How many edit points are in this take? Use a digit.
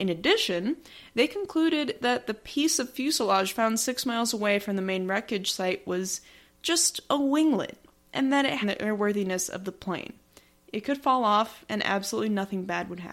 1